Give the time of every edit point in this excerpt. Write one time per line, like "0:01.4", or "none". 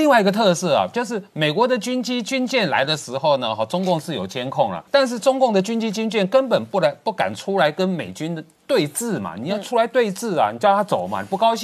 0:04.9